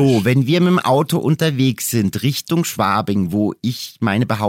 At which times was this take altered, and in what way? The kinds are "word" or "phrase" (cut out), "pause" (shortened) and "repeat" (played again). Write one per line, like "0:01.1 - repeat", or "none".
none